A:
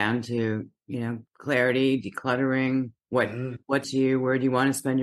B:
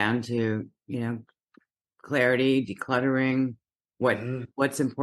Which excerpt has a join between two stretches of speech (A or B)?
A